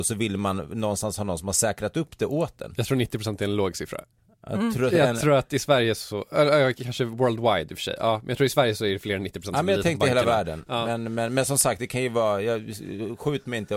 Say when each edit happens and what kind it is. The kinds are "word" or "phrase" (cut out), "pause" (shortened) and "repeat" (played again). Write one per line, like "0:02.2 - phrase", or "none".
none

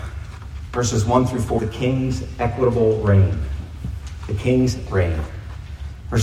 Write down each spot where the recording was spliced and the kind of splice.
0:01.6 - word
0:04.9 - word

